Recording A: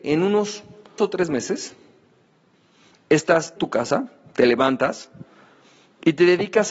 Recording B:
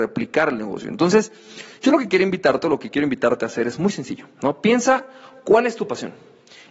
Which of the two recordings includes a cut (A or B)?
A